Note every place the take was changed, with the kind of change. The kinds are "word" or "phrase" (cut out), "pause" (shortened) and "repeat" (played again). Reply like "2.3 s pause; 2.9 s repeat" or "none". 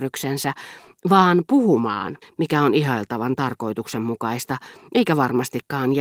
2.2 s pause